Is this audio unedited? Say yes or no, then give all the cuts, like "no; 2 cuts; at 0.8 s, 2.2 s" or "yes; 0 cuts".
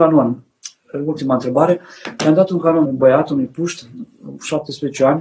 no; 1 cut; at 2.9 s